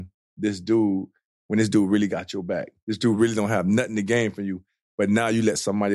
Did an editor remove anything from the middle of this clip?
no; 0 cuts

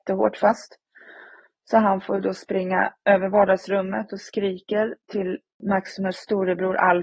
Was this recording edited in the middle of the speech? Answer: no; 0 cuts

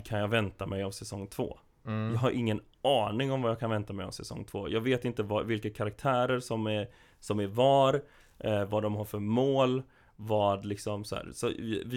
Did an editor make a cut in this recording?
no; 0 cuts

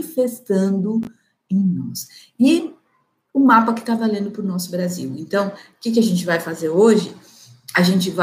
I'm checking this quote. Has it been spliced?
no; 0 cuts

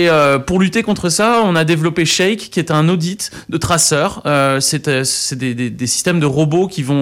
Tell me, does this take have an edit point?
no; 0 cuts

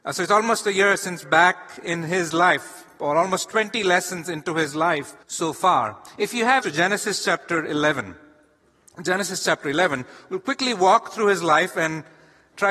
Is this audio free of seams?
no; 3 cuts; at 1.2 s, 5.2 s, 6.6 s

